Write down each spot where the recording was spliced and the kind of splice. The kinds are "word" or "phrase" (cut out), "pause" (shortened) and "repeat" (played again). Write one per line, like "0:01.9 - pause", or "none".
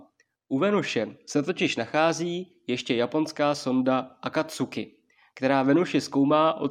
none